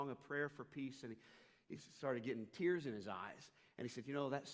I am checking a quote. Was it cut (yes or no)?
no